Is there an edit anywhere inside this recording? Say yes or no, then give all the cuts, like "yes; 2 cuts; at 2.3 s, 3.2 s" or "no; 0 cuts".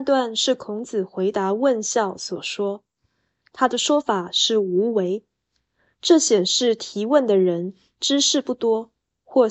no; 0 cuts